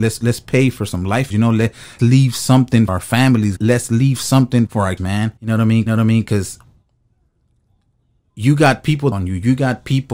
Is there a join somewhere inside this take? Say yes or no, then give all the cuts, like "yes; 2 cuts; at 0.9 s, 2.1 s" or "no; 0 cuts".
yes; 9 cuts; at 1.3 s, 2.0 s, 2.9 s, 3.6 s, 4.7 s, 5.0 s, 5.4 s, 5.9 s, 9.1 s